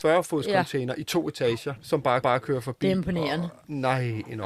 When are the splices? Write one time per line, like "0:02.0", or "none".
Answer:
0:02.2